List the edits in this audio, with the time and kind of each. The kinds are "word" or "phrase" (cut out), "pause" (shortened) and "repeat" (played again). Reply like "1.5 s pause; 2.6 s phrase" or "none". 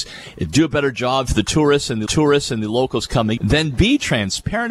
2.1 s repeat; 3.4 s word